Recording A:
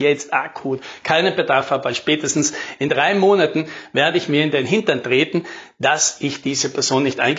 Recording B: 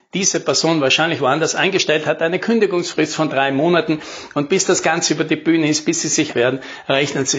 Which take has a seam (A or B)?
B